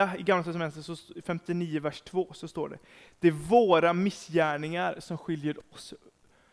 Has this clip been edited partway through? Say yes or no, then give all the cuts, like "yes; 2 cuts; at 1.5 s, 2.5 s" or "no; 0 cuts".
no; 0 cuts